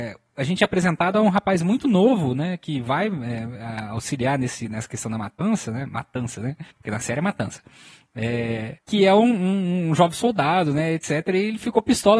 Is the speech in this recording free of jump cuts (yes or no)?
no